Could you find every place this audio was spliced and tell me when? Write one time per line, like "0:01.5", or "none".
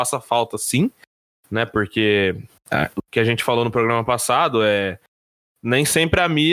none